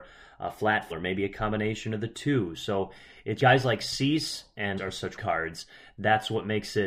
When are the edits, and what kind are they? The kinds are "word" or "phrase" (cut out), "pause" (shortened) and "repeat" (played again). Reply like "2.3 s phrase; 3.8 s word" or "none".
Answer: 0.9 s word; 3.4 s word; 4.8 s word; 5.2 s word